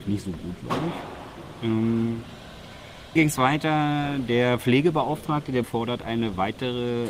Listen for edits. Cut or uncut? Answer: cut